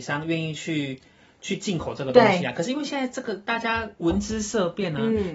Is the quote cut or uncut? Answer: uncut